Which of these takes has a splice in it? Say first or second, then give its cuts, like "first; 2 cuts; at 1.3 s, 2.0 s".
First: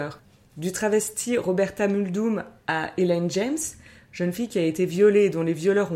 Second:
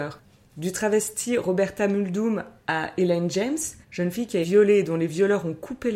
second; 2 cuts; at 3.8 s, 4.4 s